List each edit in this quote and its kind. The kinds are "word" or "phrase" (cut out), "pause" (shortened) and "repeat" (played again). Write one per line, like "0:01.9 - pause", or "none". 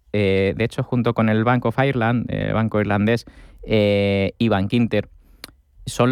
none